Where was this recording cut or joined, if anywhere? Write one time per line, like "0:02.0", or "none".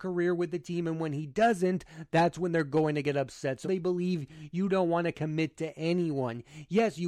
0:03.6

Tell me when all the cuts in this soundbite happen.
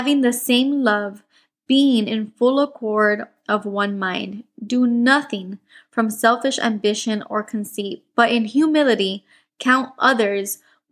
none

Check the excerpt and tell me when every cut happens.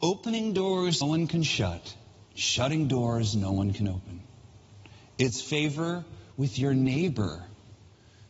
0:01.0
0:02.3

